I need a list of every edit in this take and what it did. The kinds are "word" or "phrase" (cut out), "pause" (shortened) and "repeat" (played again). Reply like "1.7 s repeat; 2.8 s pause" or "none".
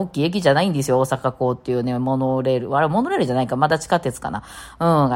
none